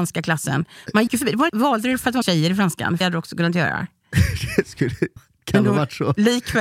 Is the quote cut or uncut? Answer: cut